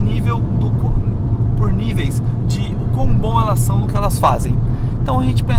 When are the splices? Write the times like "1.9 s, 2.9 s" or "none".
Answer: none

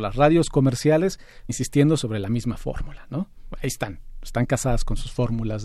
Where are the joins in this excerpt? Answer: 1.5 s

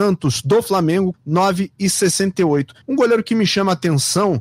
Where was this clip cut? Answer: 1.1 s, 2.8 s

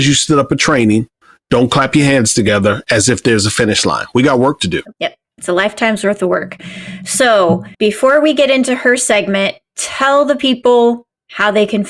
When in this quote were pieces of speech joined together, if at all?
4.9 s, 7.7 s

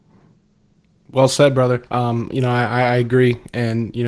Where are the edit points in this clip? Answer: 1.9 s

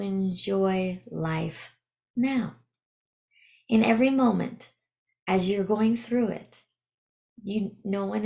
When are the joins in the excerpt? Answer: none

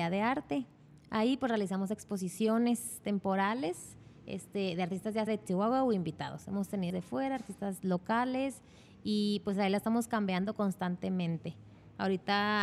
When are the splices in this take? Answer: 5.3 s, 6.9 s

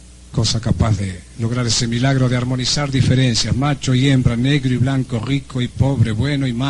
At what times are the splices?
none

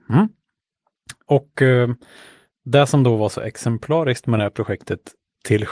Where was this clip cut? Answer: none

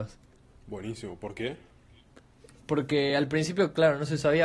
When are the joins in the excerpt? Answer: none

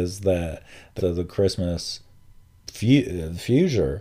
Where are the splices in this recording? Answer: 1.0 s

